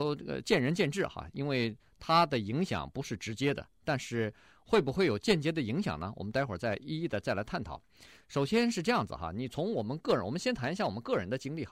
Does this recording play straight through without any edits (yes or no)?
yes